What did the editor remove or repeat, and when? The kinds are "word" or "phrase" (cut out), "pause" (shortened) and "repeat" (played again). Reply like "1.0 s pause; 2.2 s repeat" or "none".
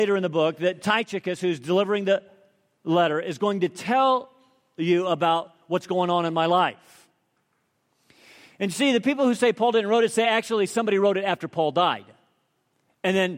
none